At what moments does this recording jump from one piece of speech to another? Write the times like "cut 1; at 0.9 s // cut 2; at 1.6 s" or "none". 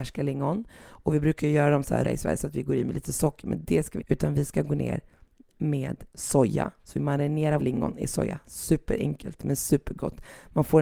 cut 1; at 2.0 s // cut 2; at 4.0 s // cut 3; at 7.6 s